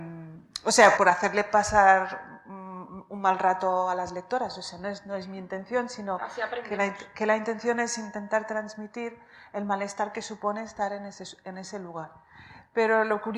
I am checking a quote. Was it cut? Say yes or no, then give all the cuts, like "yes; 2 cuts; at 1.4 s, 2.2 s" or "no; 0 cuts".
yes; 1 cut; at 1.0 s